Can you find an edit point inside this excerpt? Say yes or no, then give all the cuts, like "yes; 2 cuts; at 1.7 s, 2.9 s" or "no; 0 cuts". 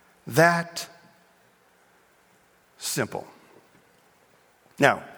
no; 0 cuts